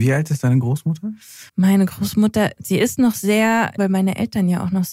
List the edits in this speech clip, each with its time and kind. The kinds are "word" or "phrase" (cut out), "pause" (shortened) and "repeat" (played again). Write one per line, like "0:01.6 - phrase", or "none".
0:01.5 - pause
0:02.6 - word
0:03.8 - word